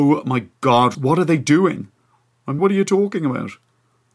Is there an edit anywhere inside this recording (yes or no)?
yes